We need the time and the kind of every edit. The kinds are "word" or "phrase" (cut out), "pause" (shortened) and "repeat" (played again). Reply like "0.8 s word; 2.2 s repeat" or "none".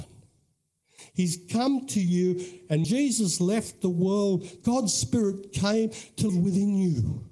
2.8 s word; 4.6 s phrase; 6.3 s word